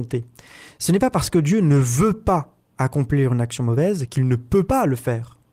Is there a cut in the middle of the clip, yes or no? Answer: no